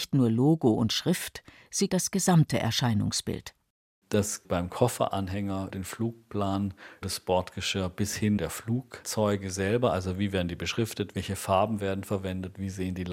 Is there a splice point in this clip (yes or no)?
yes